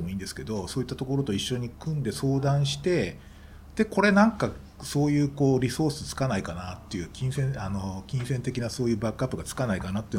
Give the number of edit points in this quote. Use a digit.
1